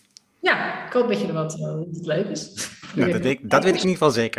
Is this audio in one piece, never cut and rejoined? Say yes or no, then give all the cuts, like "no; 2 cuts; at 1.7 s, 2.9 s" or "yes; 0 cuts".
yes; 0 cuts